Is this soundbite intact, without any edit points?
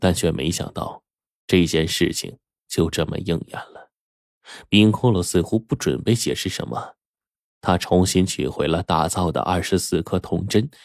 yes; 0 cuts

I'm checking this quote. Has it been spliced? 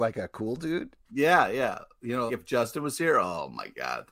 yes; 1 cut; at 2.3 s

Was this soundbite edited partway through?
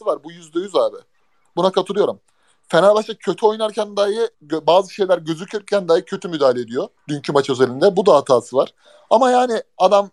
yes; 2 cuts; at 4.3 s, 7.0 s

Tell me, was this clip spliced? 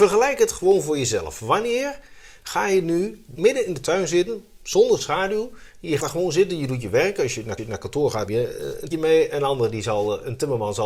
yes; 5 cuts; at 3.3 s, 6.0 s, 7.6 s, 8.3 s, 8.9 s

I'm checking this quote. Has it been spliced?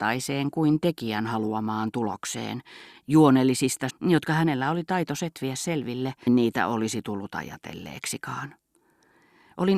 yes; 2 cuts; at 3.9 s, 6.3 s

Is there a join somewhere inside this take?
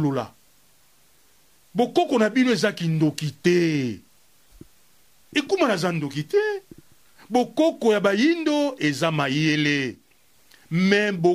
no; 0 cuts

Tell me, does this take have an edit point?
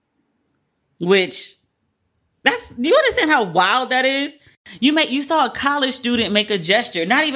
no; 0 cuts

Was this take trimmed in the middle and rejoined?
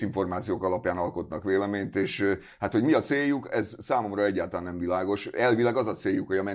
no; 0 cuts

